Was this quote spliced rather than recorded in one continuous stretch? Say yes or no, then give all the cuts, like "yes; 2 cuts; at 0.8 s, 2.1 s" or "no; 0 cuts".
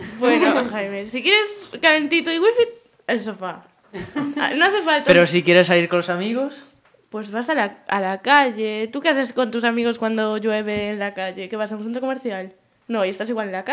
no; 0 cuts